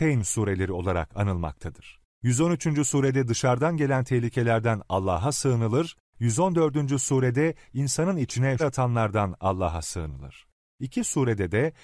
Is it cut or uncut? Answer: cut